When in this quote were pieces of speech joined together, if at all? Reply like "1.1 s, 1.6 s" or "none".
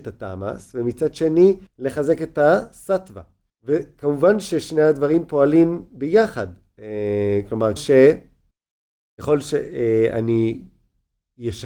1.7 s, 3.5 s, 7.8 s, 8.5 s